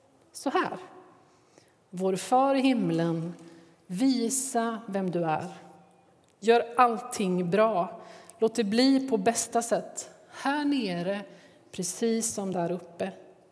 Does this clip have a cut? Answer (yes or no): no